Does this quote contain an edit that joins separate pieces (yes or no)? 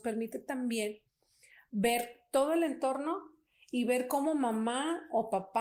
no